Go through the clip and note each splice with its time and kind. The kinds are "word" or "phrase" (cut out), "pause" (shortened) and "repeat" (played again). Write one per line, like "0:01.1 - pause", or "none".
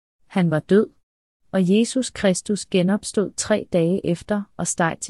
none